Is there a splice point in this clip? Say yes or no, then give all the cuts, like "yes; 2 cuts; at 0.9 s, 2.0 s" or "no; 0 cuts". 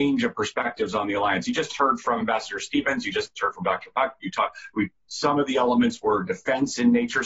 no; 0 cuts